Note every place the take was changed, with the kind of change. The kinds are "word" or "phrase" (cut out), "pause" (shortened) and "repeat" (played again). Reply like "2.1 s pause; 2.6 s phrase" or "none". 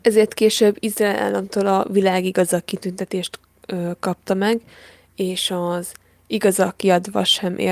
none

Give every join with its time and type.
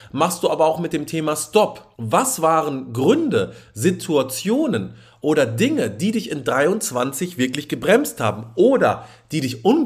1.9 s pause

